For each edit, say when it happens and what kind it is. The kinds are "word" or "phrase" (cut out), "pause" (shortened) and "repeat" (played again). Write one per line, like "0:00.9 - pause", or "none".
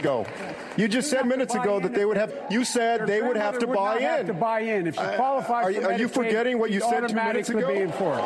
0:01.2 - word
0:02.3 - phrase